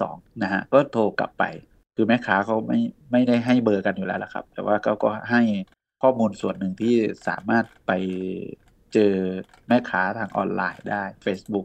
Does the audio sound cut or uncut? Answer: uncut